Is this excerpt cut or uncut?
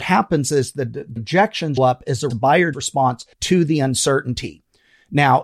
cut